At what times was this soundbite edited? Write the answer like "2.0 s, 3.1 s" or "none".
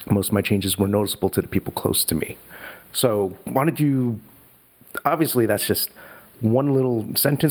2.8 s

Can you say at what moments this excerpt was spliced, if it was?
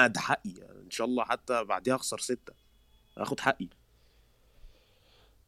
none

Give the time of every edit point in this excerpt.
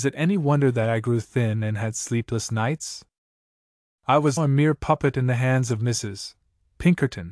4.4 s

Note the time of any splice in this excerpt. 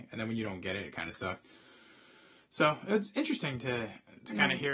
none

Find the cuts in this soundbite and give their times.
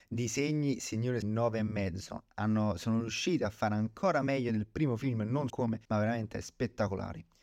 1.2 s, 5.5 s, 5.8 s

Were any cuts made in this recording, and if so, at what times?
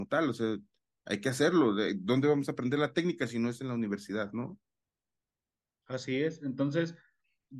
none

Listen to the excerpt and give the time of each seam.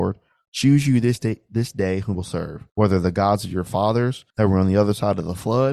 2.1 s, 2.7 s, 4.3 s

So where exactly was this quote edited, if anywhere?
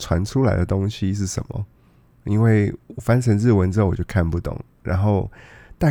none

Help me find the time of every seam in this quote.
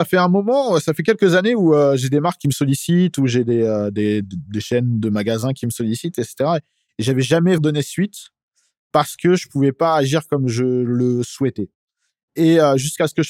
4.2 s, 7.6 s

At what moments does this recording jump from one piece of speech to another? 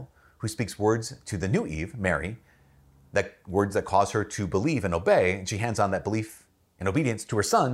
none

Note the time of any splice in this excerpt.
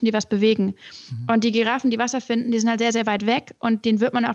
none

